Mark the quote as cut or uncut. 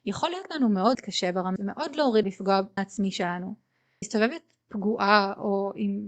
cut